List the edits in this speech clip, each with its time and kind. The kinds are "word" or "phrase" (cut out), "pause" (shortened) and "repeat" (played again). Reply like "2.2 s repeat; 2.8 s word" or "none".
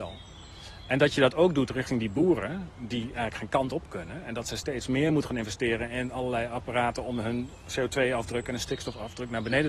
none